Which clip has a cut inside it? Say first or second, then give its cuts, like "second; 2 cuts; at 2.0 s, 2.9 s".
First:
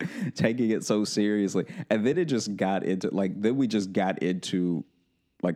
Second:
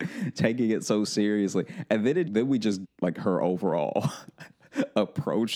second; 2 cuts; at 2.3 s, 2.8 s